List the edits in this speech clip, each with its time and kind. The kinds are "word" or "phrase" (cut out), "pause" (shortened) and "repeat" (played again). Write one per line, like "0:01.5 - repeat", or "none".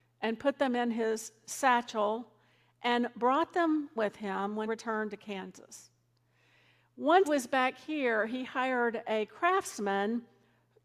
0:04.0 - word
0:04.6 - word
0:07.2 - word